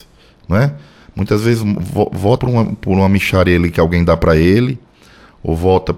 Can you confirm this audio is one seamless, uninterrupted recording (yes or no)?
no